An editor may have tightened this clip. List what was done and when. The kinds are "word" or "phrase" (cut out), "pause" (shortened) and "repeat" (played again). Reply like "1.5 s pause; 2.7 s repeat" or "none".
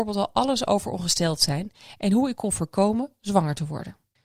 none